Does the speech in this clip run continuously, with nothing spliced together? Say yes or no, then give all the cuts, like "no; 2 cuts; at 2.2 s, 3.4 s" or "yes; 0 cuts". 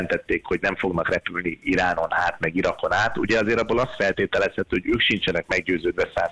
yes; 0 cuts